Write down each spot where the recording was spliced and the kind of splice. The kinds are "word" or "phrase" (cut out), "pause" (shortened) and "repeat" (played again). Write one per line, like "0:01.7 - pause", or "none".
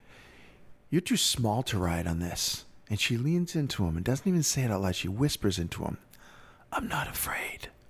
none